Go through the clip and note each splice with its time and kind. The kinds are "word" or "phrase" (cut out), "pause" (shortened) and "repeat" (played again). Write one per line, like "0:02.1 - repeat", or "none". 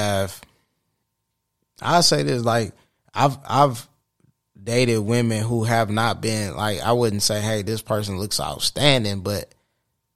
none

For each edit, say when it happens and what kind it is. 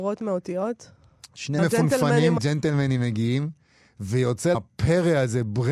0:01.6 - word
0:02.4 - word
0:04.5 - word

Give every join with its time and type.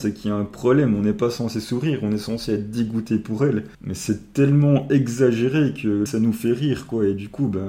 0:03.7 - pause
0:06.1 - word

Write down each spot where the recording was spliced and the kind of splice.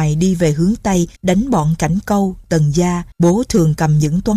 0:01.2 - pause
0:03.1 - pause

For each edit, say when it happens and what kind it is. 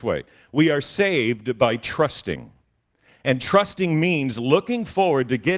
none

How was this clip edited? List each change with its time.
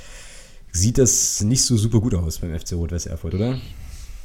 0:03.3 - word

